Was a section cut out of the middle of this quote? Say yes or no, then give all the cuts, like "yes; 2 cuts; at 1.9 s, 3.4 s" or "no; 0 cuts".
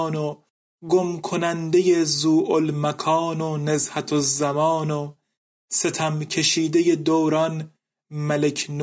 no; 0 cuts